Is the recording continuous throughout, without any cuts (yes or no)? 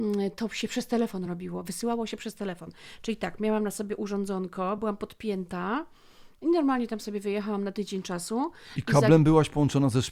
yes